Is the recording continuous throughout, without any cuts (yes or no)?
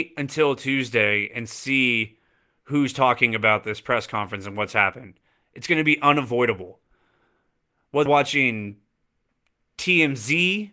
no